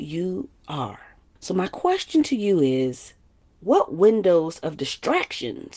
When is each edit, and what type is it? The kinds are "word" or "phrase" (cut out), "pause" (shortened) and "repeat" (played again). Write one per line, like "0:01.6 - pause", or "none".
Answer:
none